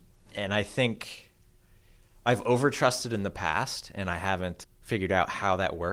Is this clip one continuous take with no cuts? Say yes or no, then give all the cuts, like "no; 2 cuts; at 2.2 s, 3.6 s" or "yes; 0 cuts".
no; 1 cut; at 4.6 s